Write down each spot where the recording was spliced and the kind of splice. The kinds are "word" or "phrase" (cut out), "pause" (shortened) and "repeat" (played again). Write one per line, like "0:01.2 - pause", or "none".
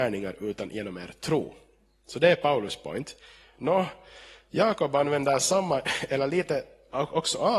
none